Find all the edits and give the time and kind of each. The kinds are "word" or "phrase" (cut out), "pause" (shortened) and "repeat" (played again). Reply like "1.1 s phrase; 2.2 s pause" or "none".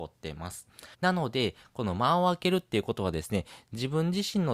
0.9 s pause